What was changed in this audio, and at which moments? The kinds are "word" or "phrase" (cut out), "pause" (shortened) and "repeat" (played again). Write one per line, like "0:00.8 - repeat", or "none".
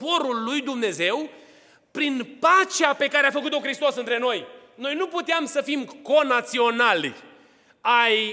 none